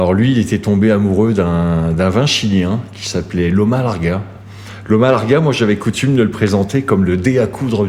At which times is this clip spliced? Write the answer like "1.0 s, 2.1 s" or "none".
none